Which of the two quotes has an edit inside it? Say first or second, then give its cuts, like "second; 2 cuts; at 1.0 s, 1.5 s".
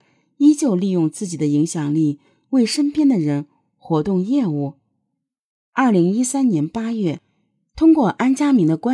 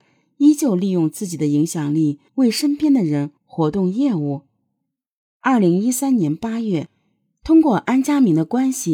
second; 2 cuts; at 2.3 s, 3.4 s